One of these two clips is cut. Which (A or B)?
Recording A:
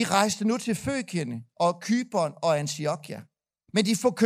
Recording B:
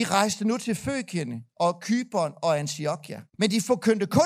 B